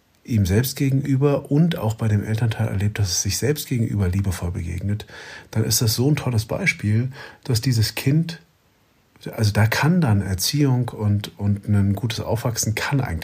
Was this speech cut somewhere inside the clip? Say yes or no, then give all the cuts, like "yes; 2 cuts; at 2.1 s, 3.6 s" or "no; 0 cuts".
no; 0 cuts